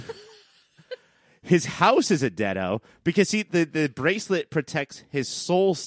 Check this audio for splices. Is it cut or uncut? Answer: uncut